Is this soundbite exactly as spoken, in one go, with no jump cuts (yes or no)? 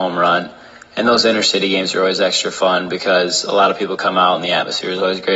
yes